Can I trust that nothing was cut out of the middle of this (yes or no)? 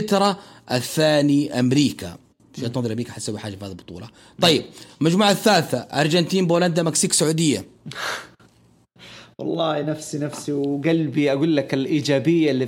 yes